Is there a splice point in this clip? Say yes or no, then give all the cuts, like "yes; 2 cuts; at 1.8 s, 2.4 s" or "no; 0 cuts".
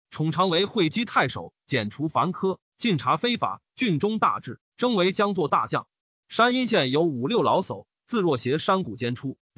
no; 0 cuts